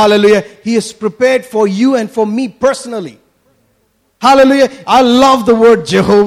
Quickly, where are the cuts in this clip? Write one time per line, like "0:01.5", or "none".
none